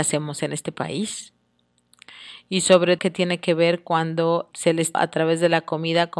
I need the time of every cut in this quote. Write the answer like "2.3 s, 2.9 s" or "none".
3.0 s, 4.5 s, 4.9 s